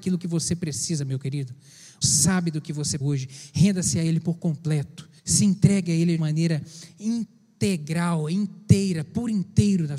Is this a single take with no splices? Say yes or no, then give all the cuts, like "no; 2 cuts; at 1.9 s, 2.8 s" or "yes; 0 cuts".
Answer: no; 4 cuts; at 2.0 s, 3.0 s, 5.2 s, 6.2 s